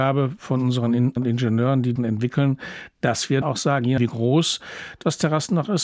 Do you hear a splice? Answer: yes; 4 cuts; at 1.2 s, 2.0 s, 3.4 s, 4.0 s

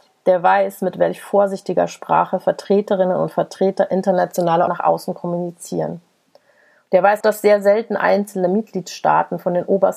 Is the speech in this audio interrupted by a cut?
yes; 2 cuts; at 4.7 s, 7.2 s

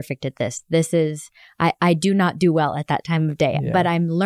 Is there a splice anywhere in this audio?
no; 0 cuts

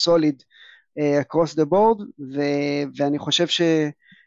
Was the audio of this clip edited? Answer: no; 0 cuts

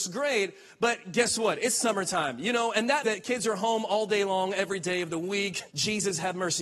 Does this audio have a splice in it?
yes; 2 cuts; at 3.0 s, 5.7 s

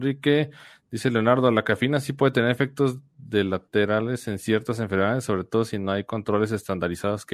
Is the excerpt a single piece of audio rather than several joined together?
yes; 0 cuts

